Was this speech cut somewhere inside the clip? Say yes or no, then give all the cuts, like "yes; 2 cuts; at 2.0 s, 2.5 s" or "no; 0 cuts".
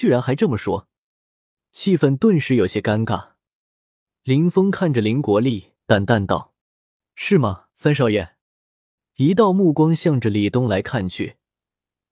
yes; 4 cuts; at 5.8 s, 6.6 s, 7.7 s, 8.4 s